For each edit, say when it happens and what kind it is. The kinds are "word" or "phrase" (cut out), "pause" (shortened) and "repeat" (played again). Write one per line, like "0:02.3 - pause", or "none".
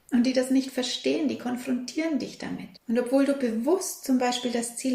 0:02.8 - pause